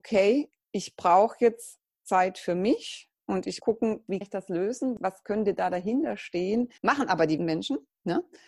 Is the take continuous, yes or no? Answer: no